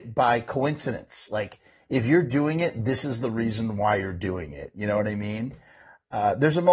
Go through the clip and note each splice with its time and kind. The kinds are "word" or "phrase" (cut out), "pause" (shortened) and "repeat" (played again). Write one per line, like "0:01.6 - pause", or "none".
none